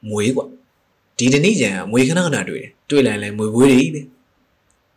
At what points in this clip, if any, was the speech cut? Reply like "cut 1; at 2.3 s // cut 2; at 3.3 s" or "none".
cut 1; at 2.8 s